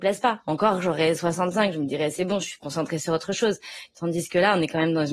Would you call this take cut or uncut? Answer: uncut